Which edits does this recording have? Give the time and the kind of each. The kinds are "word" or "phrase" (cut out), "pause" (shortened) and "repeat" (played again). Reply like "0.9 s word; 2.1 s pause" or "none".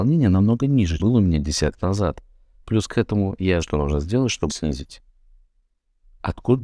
1.0 s word; 1.8 s word; 3.6 s word; 4.5 s word